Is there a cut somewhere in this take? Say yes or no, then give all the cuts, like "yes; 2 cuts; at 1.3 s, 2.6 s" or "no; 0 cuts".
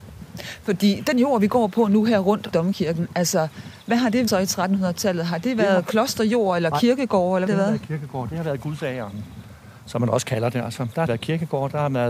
yes; 4 cuts; at 2.5 s, 4.3 s, 7.5 s, 11.1 s